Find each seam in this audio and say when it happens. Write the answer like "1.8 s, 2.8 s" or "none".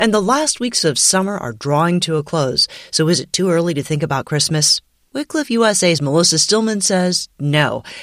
none

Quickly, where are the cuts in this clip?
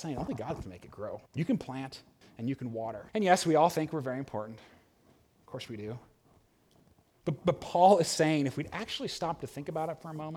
1.3 s, 2.2 s, 3.1 s

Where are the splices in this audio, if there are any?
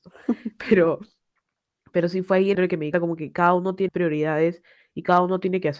2.5 s, 2.9 s, 3.9 s

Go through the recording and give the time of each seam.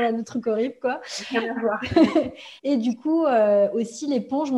2.6 s

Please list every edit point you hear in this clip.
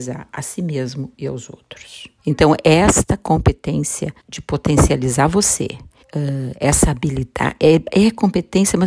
2.2 s, 4.2 s, 6.0 s

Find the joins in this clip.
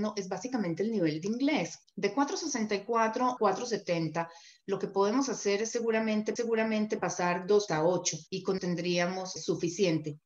1.8 s, 3.4 s, 6.4 s, 7.7 s, 8.3 s, 8.6 s, 9.4 s

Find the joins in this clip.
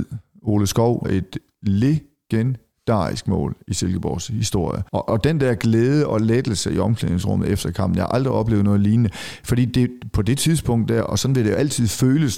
1.0 s, 4.9 s

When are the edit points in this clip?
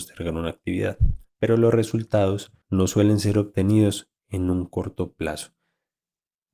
1.3 s, 2.6 s

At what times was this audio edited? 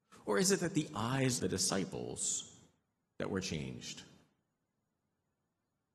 1.4 s

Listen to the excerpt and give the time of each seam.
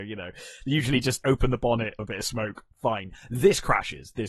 1.2 s, 2.0 s

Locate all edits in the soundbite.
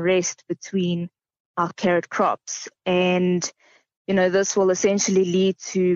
none

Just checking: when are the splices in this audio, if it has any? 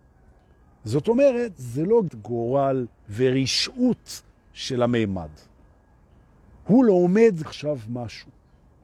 2.1 s, 7.4 s

